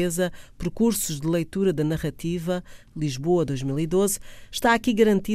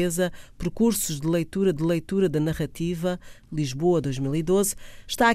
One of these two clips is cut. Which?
second; 1 cut; at 1.8 s

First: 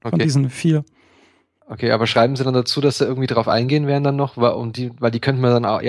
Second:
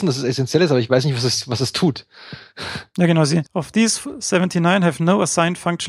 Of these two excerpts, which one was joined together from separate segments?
second; 1 cut; at 3.5 s

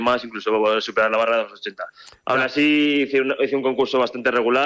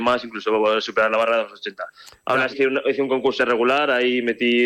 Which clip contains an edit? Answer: second; 2 cuts; at 2.5 s, 3.4 s

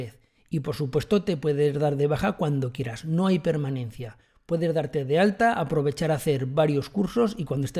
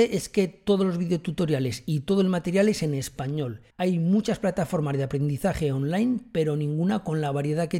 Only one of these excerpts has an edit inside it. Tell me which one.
second; 1 cut; at 3.7 s

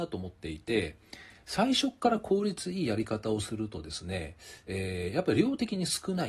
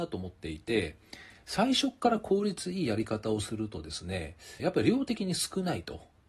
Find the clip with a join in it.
second; 1 cut; at 4.6 s

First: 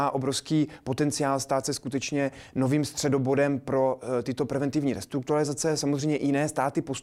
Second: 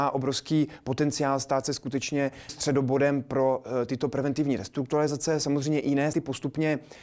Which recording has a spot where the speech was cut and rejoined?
second; 2 cuts; at 2.5 s, 6.1 s

